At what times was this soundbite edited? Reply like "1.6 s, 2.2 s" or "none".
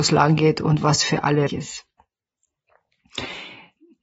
1.5 s